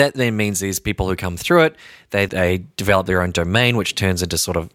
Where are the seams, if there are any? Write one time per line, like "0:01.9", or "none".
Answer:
0:02.3